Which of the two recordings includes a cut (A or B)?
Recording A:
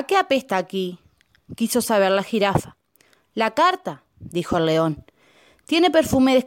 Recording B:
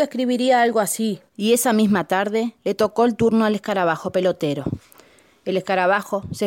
B